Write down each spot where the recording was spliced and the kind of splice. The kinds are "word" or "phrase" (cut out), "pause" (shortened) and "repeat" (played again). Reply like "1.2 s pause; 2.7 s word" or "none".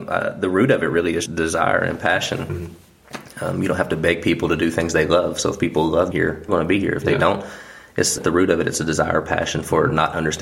1.3 s word; 6.1 s word; 6.5 s word; 8.2 s word